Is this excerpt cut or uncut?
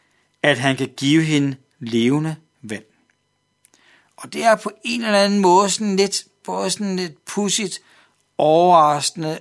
uncut